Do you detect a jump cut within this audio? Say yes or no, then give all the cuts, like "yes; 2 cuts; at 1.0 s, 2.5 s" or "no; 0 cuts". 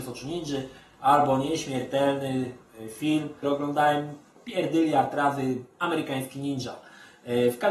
yes; 1 cut; at 3.4 s